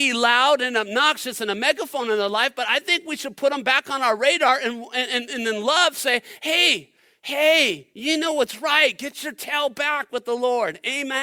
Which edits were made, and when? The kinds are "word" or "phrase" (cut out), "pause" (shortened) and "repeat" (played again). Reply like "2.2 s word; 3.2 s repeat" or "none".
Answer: none